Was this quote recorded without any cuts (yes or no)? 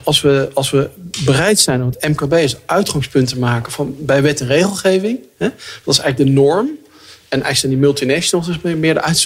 yes